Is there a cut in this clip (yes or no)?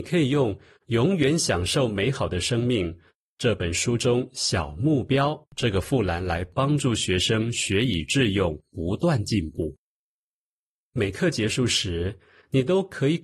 yes